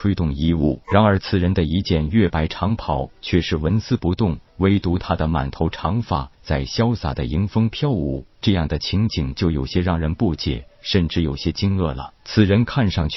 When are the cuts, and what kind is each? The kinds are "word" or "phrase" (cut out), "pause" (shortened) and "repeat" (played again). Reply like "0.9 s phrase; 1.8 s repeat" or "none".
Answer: 12.2 s pause